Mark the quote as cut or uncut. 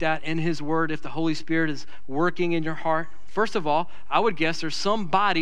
uncut